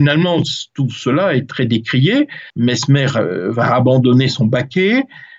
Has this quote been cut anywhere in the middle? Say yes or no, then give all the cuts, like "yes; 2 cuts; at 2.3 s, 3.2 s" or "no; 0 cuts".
yes; 1 cut; at 2.5 s